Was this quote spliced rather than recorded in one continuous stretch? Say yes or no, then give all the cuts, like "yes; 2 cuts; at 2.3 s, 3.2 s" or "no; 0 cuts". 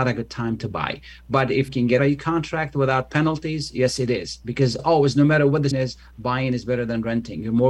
yes; 4 cuts; at 1.7 s, 2.0 s, 4.8 s, 5.7 s